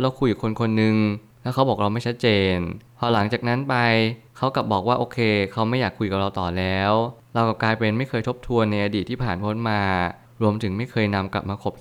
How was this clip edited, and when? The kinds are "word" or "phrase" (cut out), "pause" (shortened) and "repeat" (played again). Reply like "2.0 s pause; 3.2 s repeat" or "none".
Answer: none